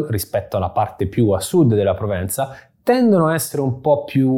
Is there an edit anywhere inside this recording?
no; 0 cuts

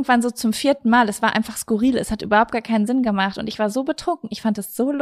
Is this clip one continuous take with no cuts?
yes; 0 cuts

